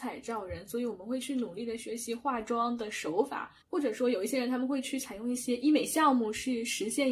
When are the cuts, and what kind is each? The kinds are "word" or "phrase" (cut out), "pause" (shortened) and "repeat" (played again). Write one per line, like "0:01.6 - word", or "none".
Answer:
0:03.6 - pause